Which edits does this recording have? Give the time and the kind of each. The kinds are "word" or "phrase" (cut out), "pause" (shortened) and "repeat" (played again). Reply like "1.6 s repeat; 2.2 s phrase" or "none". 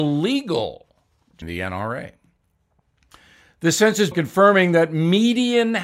1.4 s word; 4.1 s word